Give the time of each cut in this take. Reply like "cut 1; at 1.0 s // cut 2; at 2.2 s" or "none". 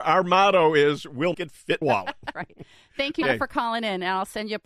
cut 1; at 1.3 s // cut 2; at 1.8 s // cut 3; at 2.3 s // cut 4; at 3.2 s